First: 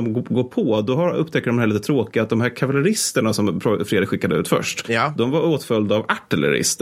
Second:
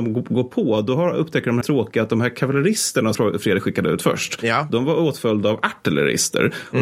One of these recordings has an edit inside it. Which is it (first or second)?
second